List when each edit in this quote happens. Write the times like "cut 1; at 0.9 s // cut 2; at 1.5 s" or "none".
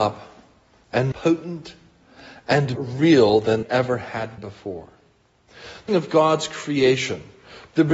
cut 1; at 1.1 s // cut 2; at 2.8 s // cut 3; at 3.6 s // cut 4; at 4.4 s // cut 5; at 5.9 s